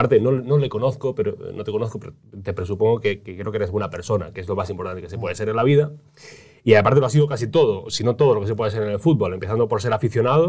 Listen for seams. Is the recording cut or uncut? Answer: uncut